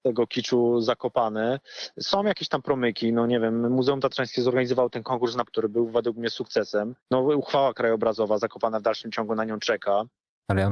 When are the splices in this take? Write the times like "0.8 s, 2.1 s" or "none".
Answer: 5.5 s, 7.0 s